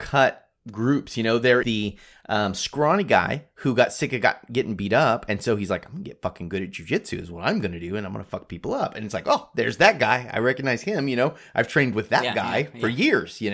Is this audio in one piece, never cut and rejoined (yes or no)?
no